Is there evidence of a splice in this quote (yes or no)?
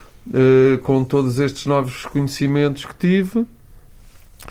no